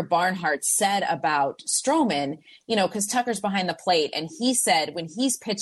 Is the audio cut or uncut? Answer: uncut